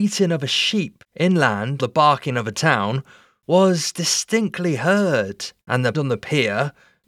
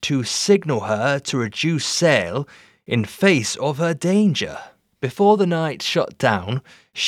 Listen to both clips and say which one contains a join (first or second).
first